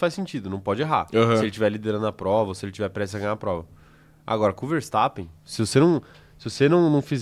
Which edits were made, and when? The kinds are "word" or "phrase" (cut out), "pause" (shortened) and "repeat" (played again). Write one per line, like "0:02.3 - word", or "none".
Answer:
none